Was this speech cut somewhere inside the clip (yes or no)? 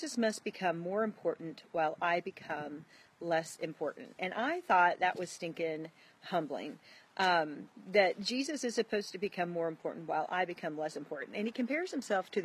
no